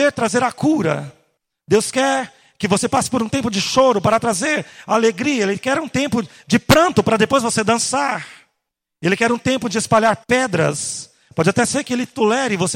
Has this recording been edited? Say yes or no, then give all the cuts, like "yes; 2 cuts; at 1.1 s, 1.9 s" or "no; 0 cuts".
yes; 1 cut; at 10.2 s